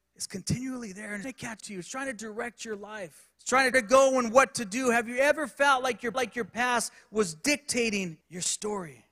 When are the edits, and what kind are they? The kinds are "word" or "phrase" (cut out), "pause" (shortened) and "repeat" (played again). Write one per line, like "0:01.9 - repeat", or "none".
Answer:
0:01.2 - word
0:01.6 - word
0:03.3 - pause
0:03.7 - phrase
0:06.1 - repeat
0:08.2 - pause